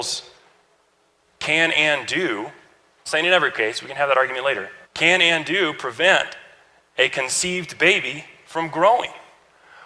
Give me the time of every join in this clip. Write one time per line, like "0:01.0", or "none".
0:03.1
0:04.8